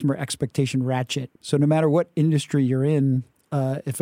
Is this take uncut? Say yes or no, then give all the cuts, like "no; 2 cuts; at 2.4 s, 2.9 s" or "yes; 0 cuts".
no; 1 cut; at 1.4 s